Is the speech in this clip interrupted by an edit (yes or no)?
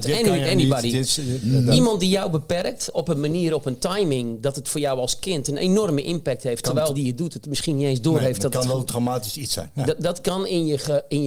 yes